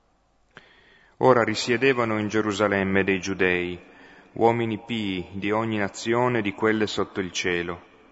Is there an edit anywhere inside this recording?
no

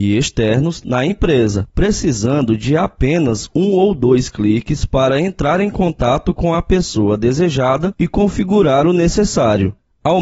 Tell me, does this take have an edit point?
no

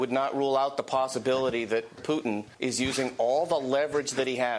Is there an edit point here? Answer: yes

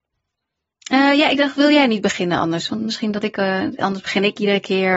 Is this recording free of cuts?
yes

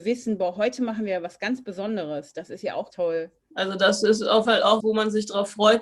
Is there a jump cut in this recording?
yes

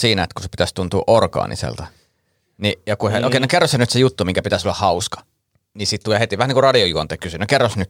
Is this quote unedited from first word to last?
yes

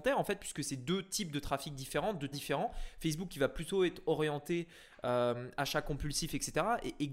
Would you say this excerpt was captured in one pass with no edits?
no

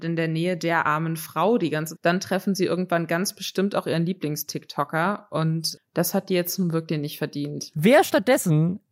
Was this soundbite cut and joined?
yes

